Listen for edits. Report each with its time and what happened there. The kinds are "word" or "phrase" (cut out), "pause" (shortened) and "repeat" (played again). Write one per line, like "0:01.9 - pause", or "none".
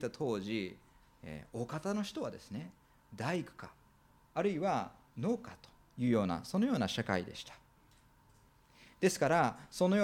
none